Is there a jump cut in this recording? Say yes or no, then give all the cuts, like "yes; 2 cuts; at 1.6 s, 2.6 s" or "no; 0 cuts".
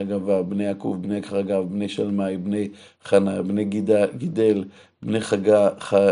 no; 0 cuts